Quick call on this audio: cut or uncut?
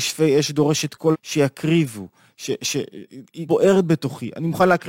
cut